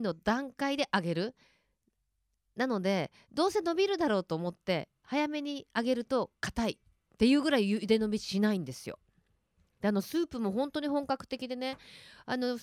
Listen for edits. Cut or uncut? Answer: uncut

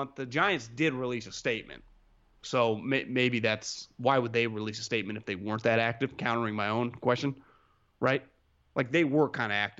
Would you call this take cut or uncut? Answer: uncut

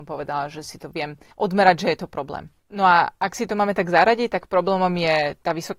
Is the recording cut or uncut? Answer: cut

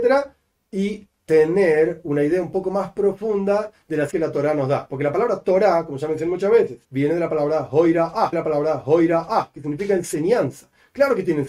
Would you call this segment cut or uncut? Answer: cut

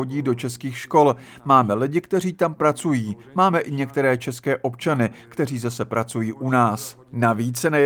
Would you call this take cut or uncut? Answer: uncut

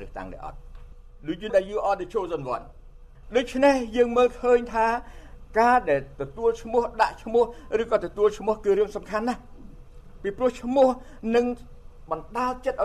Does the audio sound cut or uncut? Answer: cut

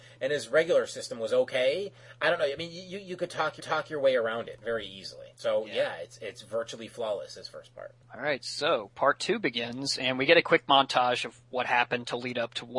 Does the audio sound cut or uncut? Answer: cut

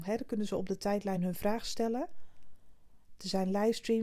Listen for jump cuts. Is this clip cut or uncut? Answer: uncut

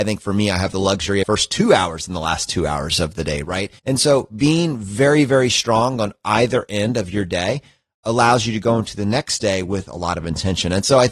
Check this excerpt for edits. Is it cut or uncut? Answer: cut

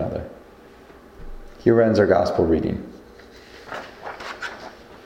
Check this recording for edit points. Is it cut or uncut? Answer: uncut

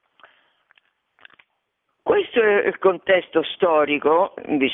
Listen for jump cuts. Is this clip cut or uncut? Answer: uncut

